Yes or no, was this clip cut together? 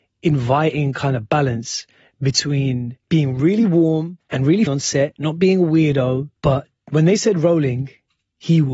yes